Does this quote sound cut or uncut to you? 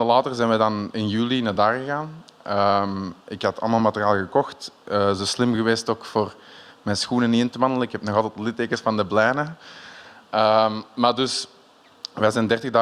uncut